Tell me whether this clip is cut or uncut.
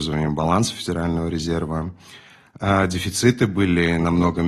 uncut